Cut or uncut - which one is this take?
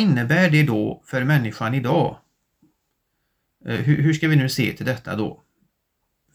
uncut